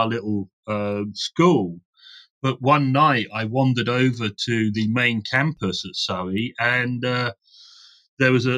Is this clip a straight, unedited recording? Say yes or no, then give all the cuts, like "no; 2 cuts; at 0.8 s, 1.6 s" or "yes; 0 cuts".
yes; 0 cuts